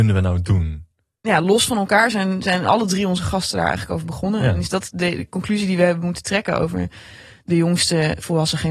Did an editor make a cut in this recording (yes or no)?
no